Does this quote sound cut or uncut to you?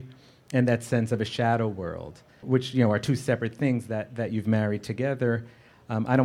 cut